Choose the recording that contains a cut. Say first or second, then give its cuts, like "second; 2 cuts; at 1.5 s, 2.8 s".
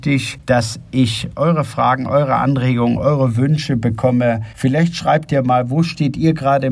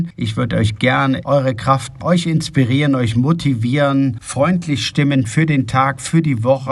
second; 2 cuts; at 1.2 s, 2.0 s